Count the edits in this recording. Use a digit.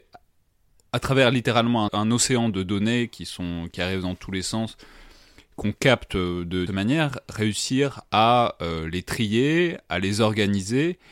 2